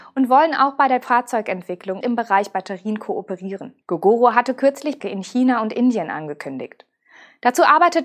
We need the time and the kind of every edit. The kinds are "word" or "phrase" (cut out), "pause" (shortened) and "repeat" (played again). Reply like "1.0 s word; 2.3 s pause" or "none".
2.0 s word; 3.8 s pause; 5.0 s phrase